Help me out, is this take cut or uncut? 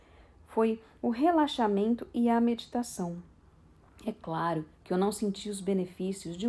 uncut